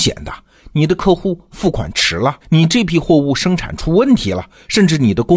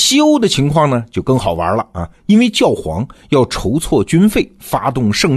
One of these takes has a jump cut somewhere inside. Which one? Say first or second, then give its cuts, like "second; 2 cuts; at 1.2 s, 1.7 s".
first; 1 cut; at 2.4 s